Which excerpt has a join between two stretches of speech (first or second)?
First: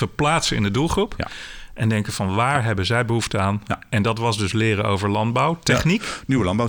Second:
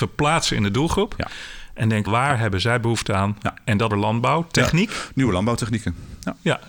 second